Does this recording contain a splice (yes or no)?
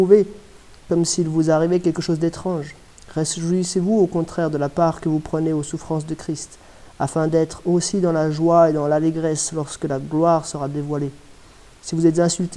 no